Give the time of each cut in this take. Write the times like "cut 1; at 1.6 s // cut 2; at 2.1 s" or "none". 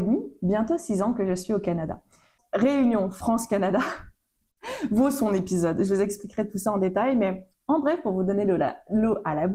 none